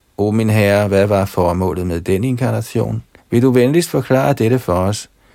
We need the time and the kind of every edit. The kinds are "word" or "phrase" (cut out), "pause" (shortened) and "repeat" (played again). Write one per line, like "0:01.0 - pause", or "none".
0:03.2 - pause